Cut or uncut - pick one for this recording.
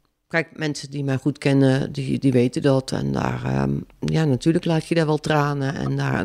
uncut